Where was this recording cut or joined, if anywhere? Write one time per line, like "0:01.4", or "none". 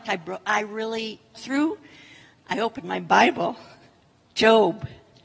0:01.3